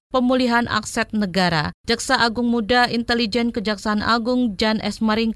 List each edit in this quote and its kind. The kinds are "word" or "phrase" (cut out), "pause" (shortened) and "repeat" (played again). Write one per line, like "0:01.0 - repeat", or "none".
none